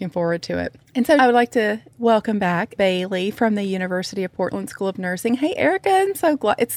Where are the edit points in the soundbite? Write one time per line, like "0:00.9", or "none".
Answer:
0:01.2
0:02.8